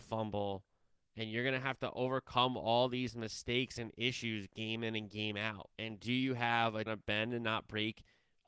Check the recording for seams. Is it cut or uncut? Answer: cut